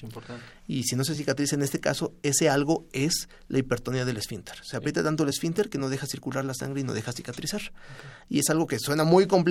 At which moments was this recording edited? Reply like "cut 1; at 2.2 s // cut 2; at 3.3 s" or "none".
none